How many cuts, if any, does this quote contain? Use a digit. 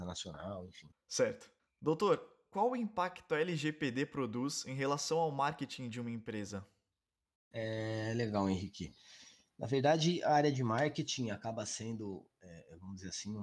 0